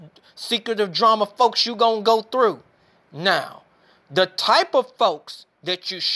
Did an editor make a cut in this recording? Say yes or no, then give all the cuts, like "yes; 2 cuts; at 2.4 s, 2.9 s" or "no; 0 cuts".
no; 0 cuts